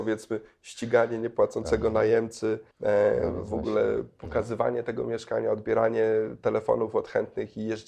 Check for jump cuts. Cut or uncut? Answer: cut